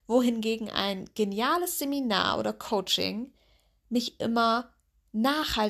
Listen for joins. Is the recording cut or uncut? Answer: uncut